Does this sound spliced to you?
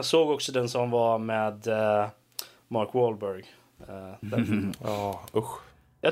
no; 0 cuts

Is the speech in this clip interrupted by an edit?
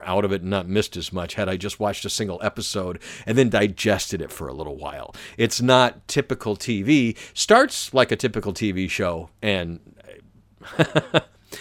no; 0 cuts

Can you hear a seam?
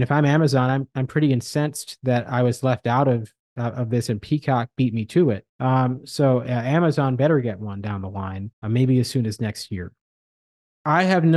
yes; 2 cuts; at 5.5 s, 8.5 s

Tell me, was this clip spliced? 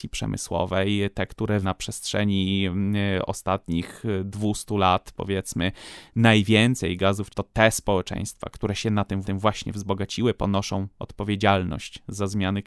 yes; 3 cuts; at 1.6 s, 7.3 s, 9.2 s

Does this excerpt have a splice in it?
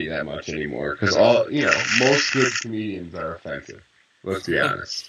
no; 0 cuts

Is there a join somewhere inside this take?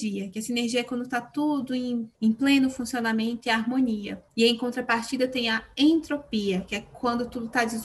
yes; 2 cuts; at 2.1 s, 4.3 s

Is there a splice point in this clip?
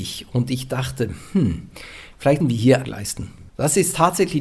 yes; 3 cuts; at 2.4 s, 2.8 s, 3.5 s

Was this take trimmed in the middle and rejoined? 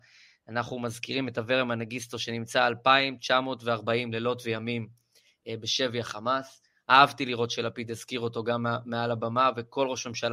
no; 0 cuts

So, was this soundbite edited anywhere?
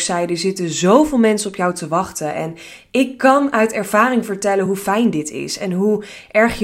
no; 0 cuts

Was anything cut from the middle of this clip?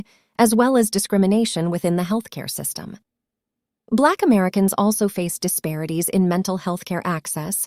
no; 0 cuts

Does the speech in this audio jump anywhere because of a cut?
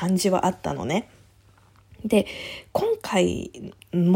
no; 0 cuts

